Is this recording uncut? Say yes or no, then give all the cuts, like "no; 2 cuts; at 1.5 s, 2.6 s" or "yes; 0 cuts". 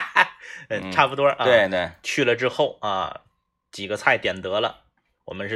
yes; 0 cuts